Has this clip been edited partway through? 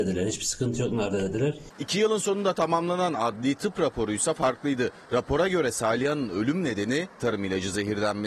no; 0 cuts

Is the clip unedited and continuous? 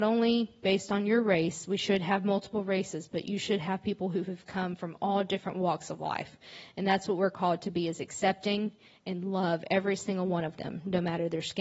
yes; 0 cuts

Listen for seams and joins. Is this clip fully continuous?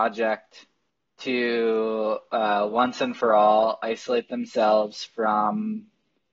yes; 0 cuts

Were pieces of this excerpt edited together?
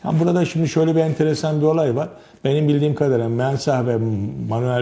no; 0 cuts

